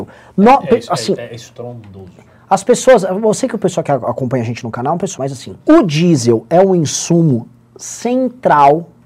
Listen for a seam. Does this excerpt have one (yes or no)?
yes